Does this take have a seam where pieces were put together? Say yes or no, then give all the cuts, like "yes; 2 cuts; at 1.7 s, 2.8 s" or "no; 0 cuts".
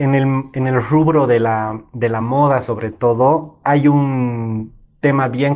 no; 0 cuts